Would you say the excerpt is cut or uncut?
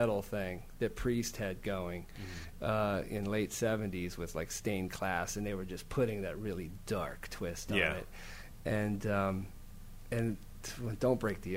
uncut